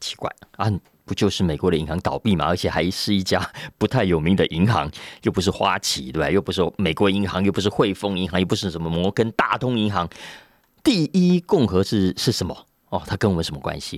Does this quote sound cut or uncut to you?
uncut